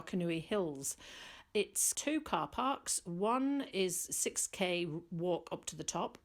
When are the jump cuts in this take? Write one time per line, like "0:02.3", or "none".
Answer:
0:01.9